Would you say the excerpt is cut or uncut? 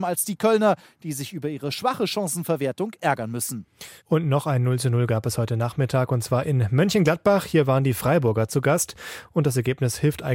cut